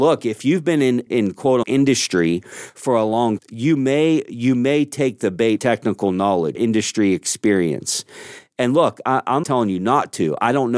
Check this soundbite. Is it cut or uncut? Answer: cut